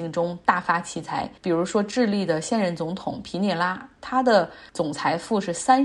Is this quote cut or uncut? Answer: cut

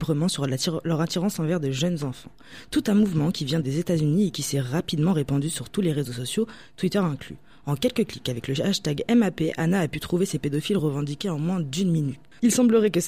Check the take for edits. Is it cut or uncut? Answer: uncut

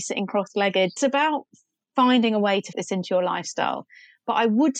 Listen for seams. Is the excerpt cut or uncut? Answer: cut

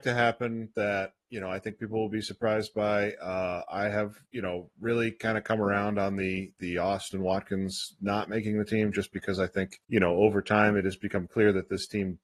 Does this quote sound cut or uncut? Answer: cut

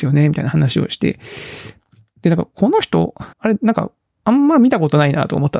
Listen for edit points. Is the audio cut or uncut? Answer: cut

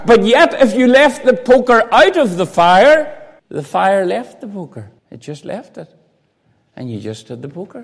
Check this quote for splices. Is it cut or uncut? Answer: cut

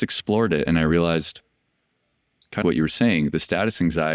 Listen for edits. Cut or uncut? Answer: cut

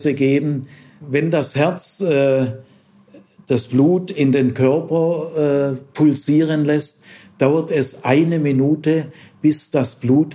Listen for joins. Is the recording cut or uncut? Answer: uncut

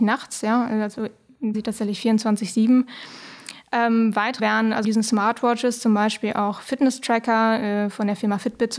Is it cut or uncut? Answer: cut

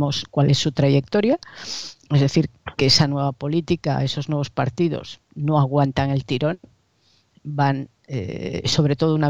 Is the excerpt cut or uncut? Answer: uncut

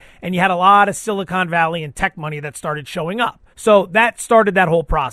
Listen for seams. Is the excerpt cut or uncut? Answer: cut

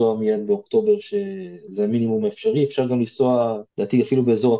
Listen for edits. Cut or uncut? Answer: cut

